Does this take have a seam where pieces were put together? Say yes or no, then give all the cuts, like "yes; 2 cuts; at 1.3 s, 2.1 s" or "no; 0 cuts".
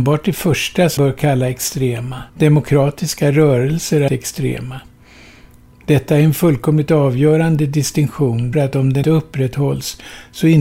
yes; 5 cuts; at 1.0 s, 2.3 s, 4.1 s, 8.5 s, 9.0 s